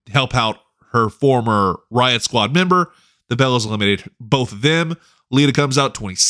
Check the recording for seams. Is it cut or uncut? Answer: uncut